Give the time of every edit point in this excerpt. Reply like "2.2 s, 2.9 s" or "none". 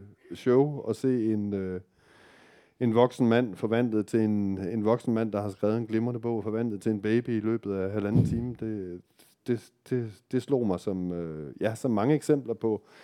none